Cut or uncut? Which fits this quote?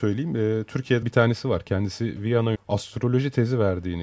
cut